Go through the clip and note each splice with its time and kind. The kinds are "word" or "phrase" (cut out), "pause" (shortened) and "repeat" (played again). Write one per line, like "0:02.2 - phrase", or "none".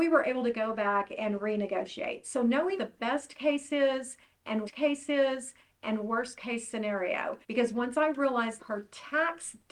0:02.8 - word
0:04.6 - repeat
0:07.4 - pause
0:08.6 - word